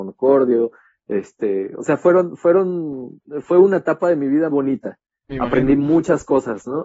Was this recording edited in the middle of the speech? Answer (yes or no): yes